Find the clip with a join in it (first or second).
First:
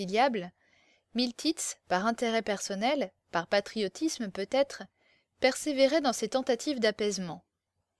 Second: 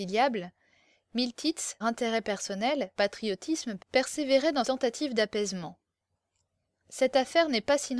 second